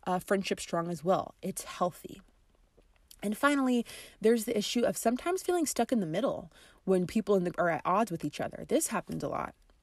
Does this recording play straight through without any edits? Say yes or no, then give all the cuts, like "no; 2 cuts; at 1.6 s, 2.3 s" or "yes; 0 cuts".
no; 2 cuts; at 7.1 s, 7.5 s